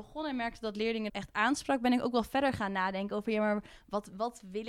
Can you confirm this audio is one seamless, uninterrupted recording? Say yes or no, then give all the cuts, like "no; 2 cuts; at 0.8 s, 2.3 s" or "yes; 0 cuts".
no; 1 cut; at 1.1 s